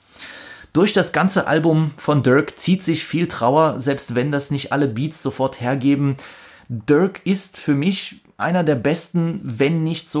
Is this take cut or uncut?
uncut